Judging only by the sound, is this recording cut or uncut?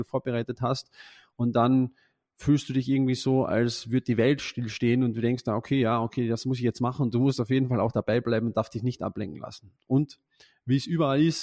uncut